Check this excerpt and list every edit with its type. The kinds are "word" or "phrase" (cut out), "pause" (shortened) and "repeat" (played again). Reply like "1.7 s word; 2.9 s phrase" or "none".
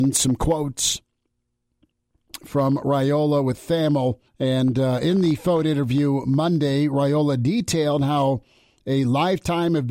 4.3 s pause